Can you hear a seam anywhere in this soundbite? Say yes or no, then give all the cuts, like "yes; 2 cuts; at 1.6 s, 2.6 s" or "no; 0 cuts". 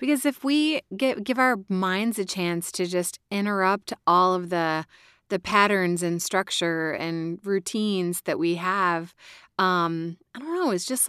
no; 0 cuts